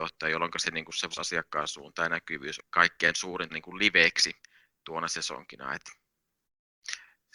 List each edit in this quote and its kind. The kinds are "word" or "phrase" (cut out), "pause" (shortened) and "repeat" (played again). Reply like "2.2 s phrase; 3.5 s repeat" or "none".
1.1 s word; 2.6 s word; 3.5 s word